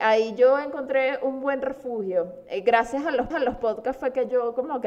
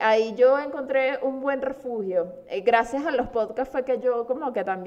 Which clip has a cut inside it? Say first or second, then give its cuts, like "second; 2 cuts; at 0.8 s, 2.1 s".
first; 1 cut; at 3.3 s